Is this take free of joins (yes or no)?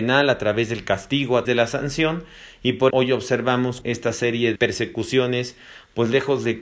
no